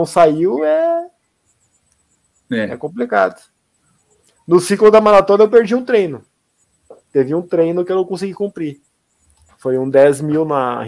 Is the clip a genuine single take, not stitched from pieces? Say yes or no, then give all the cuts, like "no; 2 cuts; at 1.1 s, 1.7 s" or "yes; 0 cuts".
yes; 0 cuts